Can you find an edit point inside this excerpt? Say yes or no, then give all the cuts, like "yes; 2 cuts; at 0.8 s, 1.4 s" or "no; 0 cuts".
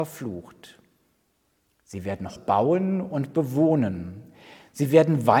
yes; 1 cut; at 2.4 s